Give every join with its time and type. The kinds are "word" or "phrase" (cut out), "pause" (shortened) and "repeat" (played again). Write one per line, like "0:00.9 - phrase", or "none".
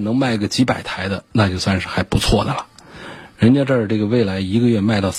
0:01.3 - pause